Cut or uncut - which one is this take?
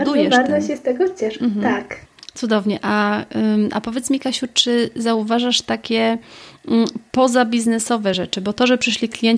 uncut